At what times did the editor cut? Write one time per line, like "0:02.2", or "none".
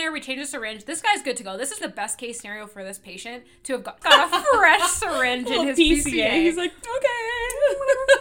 0:01.8
0:04.0